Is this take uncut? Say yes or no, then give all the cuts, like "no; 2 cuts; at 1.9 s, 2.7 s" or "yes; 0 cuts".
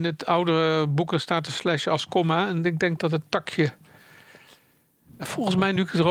yes; 0 cuts